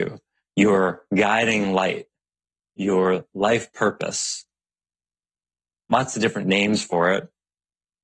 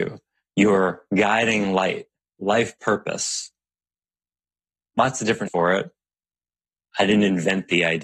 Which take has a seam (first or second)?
second